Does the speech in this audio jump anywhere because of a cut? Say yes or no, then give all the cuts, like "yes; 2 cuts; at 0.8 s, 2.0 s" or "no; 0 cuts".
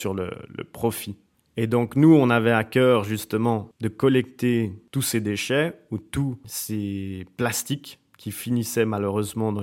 no; 0 cuts